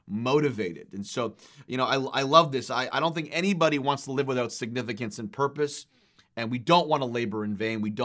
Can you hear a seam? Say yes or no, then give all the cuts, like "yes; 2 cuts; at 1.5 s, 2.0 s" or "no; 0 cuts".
no; 0 cuts